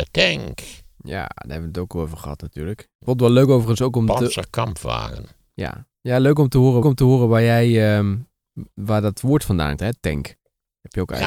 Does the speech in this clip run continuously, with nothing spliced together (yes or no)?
no